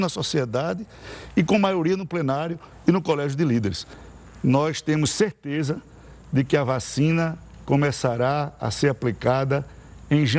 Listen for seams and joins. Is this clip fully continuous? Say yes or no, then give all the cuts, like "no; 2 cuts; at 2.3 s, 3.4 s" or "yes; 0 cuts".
yes; 0 cuts